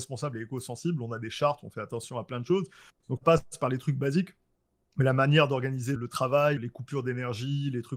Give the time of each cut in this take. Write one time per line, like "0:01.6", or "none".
0:03.2
0:06.0
0:06.6

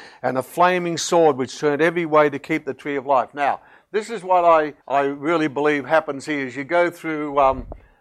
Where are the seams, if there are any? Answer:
0:04.8

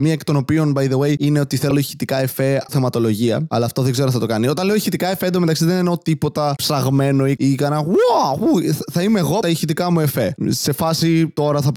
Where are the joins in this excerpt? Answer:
0:01.7
0:02.7
0:07.4
0:09.4

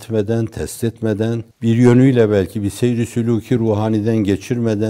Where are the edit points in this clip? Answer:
0:01.5

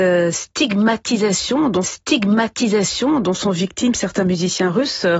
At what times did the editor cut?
0:01.8

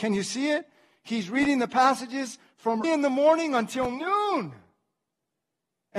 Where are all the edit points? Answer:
0:02.8

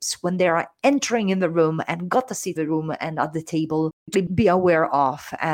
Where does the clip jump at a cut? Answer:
0:02.6
0:04.1

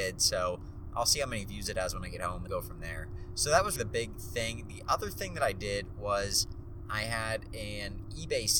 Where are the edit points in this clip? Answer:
0:02.5
0:03.8

